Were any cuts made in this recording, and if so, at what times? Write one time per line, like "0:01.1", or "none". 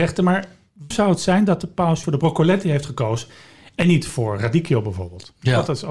0:00.9
0:02.0
0:04.4

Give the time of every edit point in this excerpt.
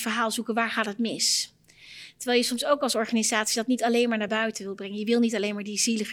none

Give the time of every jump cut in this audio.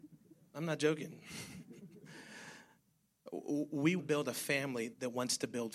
0:04.0

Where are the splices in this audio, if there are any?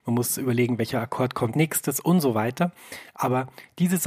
0:01.5

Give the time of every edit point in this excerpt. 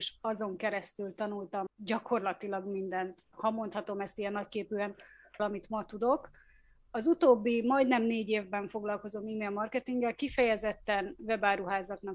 0:01.7
0:03.2
0:05.4

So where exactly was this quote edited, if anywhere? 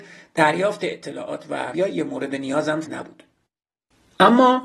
0:01.7
0:02.8

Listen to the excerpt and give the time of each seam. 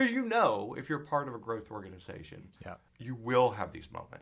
0:02.9

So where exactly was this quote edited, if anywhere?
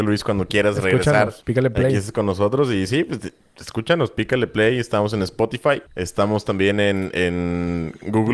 0:01.4
0:05.9

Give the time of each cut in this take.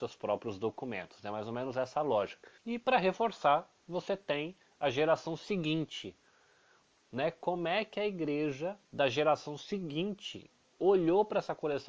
0:02.6
0:08.8

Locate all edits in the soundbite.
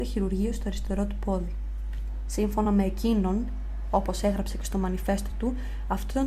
none

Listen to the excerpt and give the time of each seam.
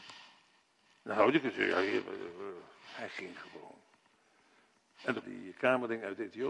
0:05.2

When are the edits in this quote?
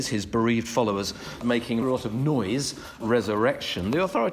0:01.4
0:01.8
0:03.0

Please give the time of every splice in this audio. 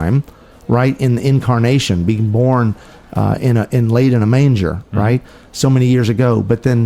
none

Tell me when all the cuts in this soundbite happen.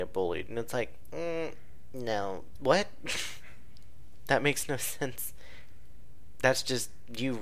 0:02.6

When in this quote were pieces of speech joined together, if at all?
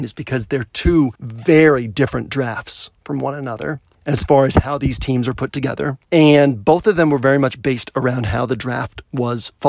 0:01.2
0:03.9
0:06.0

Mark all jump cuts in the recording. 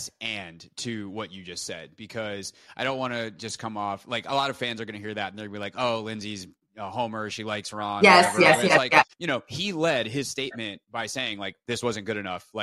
0:09.1

